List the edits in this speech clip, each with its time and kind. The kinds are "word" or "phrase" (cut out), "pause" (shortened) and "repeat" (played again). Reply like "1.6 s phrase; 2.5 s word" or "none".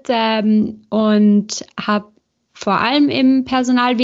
none